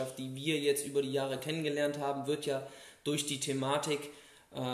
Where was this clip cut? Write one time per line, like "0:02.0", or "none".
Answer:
none